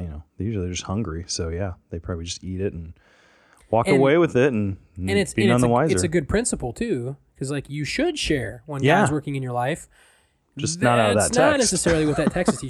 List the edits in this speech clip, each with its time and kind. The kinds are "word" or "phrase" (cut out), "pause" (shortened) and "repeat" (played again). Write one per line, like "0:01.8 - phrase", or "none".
none